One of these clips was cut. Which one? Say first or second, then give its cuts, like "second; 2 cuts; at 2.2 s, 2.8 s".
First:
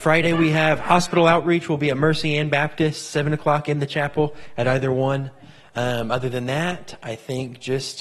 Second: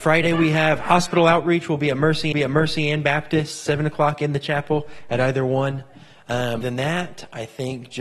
second; 2 cuts; at 2.3 s, 6.6 s